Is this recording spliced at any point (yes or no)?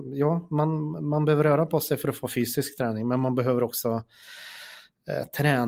no